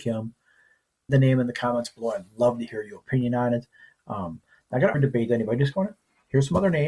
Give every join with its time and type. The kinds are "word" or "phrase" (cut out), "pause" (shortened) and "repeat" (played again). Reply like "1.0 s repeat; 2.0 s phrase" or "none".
1.1 s word; 4.9 s word